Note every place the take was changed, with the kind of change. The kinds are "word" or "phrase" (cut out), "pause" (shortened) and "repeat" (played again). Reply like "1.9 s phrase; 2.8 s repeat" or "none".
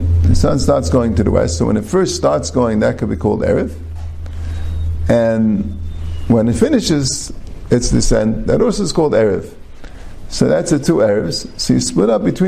none

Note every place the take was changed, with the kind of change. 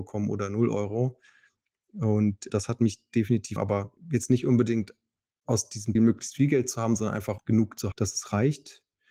3.6 s word; 6.0 s word; 7.4 s word; 7.9 s word

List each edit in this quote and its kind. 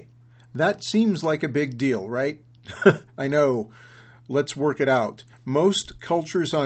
5.3 s pause

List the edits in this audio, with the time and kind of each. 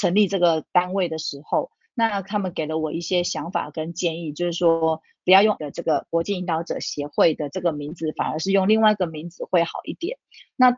5.6 s word

